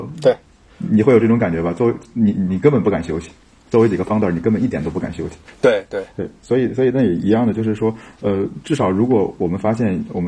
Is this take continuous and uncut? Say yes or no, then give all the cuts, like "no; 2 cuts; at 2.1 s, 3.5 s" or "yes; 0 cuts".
yes; 0 cuts